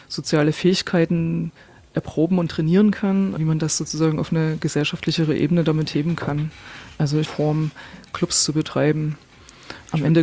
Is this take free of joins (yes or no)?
no